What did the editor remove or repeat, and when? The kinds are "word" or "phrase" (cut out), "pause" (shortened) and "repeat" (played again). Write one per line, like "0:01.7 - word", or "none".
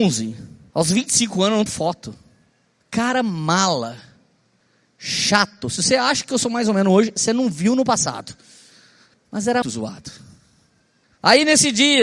0:01.7 - phrase
0:09.6 - word